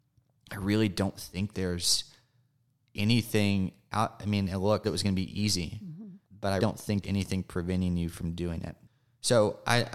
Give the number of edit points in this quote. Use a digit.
5